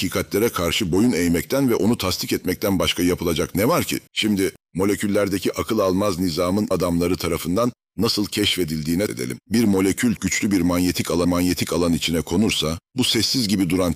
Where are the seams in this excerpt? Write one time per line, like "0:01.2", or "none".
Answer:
0:04.1
0:06.7
0:09.1
0:09.4
0:10.2
0:11.2
0:12.9